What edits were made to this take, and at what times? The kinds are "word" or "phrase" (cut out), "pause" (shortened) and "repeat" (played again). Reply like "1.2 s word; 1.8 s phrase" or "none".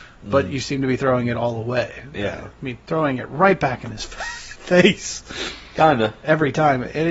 none